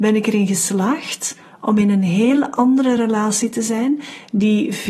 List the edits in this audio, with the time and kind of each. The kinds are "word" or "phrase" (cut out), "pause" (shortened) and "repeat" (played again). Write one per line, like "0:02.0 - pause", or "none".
none